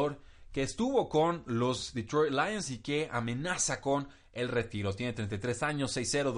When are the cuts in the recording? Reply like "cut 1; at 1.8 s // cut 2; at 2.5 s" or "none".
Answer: none